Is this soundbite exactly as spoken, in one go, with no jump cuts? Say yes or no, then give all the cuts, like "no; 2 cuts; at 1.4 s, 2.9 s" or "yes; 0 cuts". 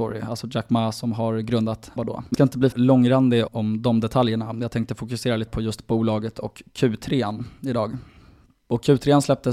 no; 5 cuts; at 2.0 s, 2.3 s, 2.7 s, 3.5 s, 5.5 s